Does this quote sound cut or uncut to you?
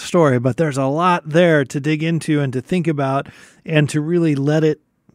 uncut